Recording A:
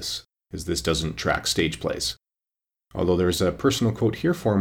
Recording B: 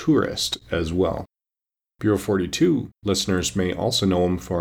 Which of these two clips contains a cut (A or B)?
B